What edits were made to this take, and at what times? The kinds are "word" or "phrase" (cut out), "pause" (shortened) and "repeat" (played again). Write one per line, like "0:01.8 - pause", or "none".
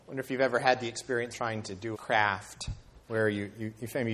0:01.3 - word
0:01.9 - word
0:03.0 - pause